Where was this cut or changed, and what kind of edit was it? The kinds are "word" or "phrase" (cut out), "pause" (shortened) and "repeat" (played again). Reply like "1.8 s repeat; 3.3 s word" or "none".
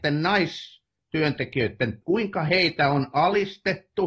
2.0 s word